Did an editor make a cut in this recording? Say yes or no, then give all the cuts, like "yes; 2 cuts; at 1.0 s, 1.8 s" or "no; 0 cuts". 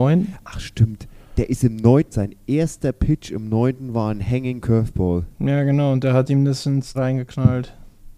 yes; 3 cuts; at 2.1 s, 5.3 s, 6.9 s